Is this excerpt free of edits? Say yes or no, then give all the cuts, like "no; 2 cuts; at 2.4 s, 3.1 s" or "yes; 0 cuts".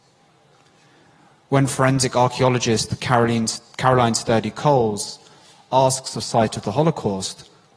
yes; 0 cuts